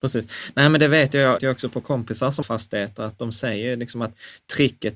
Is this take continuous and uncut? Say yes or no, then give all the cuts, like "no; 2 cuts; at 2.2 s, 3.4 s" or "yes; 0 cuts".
no; 2 cuts; at 1.4 s, 2.4 s